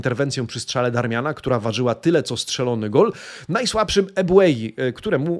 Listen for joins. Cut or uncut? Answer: uncut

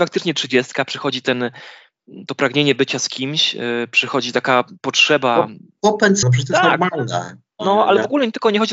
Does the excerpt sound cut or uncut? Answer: cut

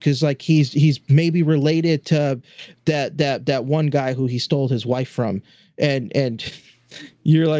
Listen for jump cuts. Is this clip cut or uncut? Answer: uncut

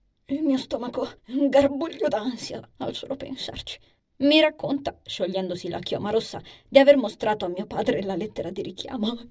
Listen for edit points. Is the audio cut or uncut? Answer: cut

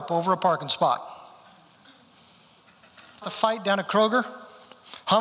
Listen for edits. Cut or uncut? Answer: cut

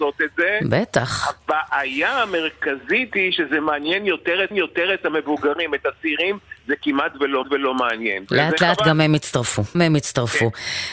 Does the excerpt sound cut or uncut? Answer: cut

